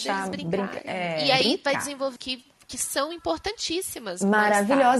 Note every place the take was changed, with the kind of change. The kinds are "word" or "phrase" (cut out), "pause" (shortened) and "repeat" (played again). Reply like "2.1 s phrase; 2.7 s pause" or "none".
2.2 s word